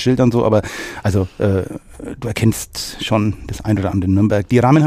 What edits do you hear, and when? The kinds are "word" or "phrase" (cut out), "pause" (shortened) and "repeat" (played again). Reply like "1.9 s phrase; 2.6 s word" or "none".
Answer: none